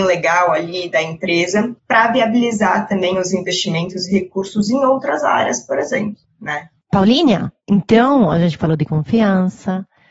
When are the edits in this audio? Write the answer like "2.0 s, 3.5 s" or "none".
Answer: 1.8 s, 6.8 s